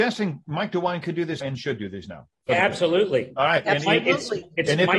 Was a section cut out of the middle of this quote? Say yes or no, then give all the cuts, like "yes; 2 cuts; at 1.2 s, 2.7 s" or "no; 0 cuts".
yes; 1 cut; at 1.4 s